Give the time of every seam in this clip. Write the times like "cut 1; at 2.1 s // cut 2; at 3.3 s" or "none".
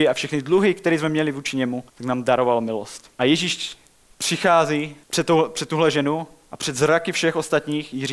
cut 1; at 1.9 s // cut 2; at 3.1 s // cut 3; at 5.0 s